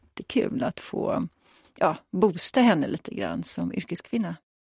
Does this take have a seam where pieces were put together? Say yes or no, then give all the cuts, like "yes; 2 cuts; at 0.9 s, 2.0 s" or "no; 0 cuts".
no; 0 cuts